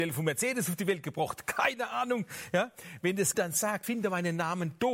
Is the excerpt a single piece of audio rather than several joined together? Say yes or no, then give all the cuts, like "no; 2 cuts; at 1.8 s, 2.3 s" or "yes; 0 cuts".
no; 2 cuts; at 3.3 s, 3.8 s